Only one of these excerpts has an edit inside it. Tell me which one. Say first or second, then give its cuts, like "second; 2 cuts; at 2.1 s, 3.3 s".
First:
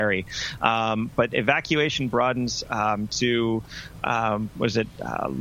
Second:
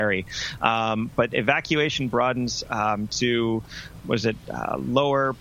second; 1 cut; at 4.0 s